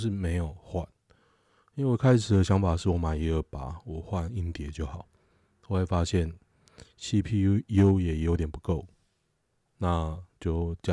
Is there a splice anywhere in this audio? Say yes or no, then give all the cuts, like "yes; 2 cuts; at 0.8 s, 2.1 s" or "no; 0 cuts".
no; 0 cuts